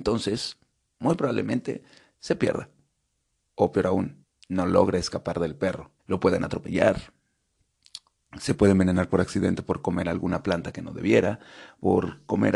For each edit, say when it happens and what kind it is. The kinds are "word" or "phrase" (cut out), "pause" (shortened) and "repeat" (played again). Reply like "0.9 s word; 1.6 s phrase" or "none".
4.2 s pause; 6.0 s pause